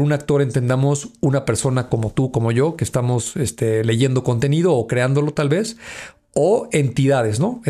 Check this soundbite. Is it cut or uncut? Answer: uncut